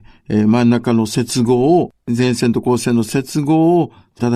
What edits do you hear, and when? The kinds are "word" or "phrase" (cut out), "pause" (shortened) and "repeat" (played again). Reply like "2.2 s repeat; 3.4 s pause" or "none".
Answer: 2.0 s pause